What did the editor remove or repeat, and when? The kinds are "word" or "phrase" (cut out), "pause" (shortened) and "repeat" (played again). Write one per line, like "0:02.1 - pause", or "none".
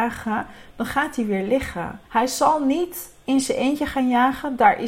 0:02.1 - pause